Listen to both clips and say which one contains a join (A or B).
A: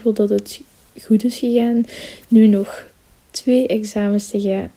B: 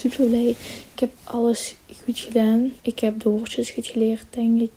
B